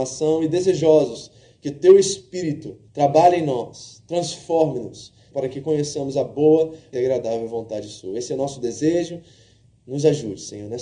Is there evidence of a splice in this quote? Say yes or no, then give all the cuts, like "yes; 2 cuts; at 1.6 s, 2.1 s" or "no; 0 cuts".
yes; 3 cuts; at 2.9 s, 5.3 s, 6.9 s